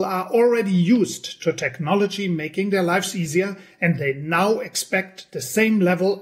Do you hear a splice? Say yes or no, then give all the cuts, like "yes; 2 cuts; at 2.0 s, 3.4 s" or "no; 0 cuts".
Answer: no; 0 cuts